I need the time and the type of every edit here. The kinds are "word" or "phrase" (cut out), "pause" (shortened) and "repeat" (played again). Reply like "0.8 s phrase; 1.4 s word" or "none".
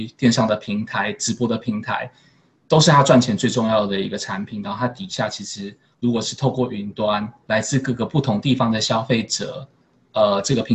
2.6 s phrase; 7.4 s pause